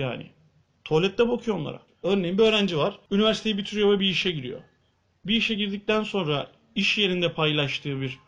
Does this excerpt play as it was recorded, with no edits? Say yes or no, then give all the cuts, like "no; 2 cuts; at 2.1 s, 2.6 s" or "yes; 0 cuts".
yes; 0 cuts